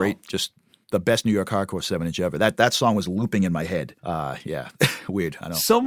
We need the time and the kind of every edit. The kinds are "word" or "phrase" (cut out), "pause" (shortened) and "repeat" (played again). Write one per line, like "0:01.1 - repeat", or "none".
0:04.0 - pause